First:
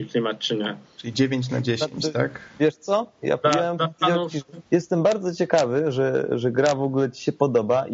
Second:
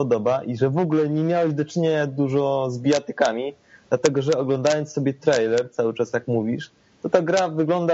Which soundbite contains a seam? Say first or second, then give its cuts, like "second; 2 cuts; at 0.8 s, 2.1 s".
first; 1 cut; at 4.7 s